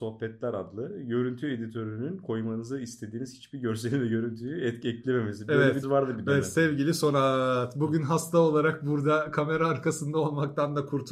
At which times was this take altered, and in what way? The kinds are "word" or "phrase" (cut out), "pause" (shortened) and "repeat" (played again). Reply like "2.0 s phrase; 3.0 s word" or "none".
5.8 s word

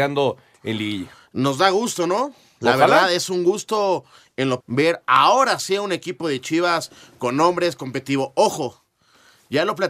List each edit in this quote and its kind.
4.6 s word

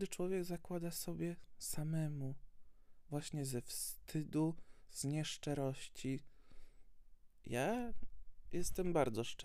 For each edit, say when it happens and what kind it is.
none

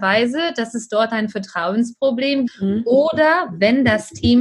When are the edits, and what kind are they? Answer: 2.5 s word

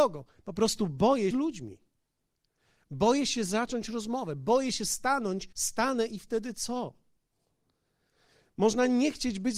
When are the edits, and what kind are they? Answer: 1.3 s phrase; 5.5 s pause

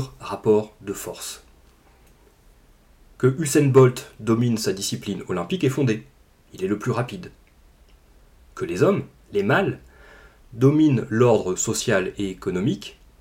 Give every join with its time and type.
none

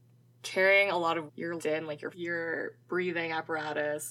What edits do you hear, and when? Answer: 1.3 s word; 1.6 s word; 2.1 s word

